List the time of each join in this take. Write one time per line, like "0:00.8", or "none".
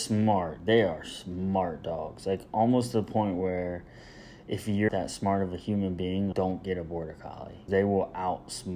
0:04.9
0:06.3
0:07.7